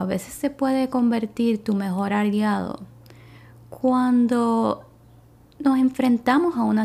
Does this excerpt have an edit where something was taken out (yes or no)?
no